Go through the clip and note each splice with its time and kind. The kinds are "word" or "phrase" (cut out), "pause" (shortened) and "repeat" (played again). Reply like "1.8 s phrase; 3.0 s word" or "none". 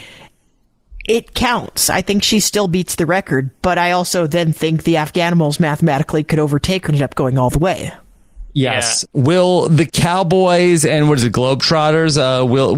6.9 s phrase